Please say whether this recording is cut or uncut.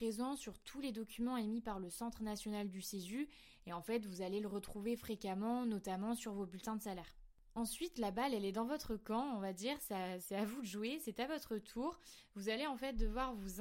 uncut